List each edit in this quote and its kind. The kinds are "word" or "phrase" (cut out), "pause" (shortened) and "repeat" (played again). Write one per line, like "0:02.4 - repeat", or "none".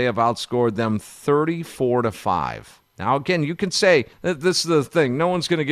0:02.9 - pause
0:04.1 - pause